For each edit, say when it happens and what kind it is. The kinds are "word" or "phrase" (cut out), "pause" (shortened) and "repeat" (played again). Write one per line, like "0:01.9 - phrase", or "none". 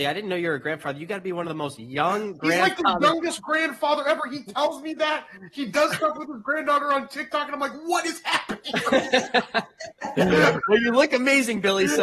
none